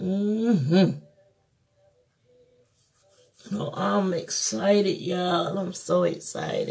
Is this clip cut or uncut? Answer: uncut